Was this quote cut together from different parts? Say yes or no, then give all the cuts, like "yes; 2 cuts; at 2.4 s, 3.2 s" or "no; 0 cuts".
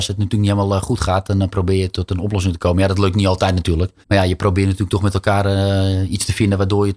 yes; 1 cut; at 4.0 s